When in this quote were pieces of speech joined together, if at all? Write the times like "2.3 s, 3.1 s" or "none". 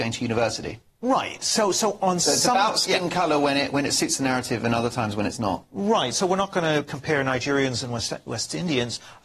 none